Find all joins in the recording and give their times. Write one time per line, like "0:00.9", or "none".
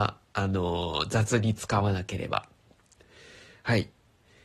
none